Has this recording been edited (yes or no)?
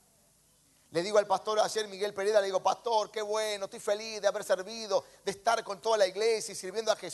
no